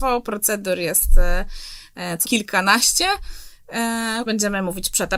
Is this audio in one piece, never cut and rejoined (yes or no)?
no